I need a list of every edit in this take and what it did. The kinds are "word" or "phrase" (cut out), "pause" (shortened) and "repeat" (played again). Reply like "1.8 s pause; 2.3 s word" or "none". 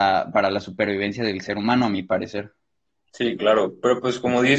2.9 s pause